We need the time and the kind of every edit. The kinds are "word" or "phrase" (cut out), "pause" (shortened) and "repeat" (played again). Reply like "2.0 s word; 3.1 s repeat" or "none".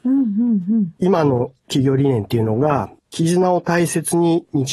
1.0 s pause; 3.0 s pause